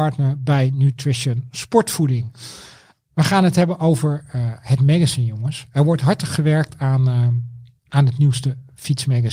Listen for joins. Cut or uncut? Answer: uncut